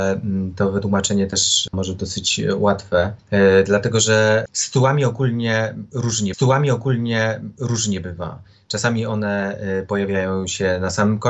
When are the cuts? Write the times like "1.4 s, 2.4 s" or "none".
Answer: 1.7 s, 6.3 s